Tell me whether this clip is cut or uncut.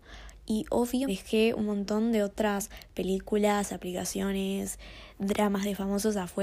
cut